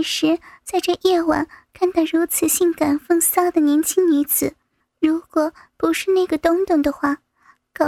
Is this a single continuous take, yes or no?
no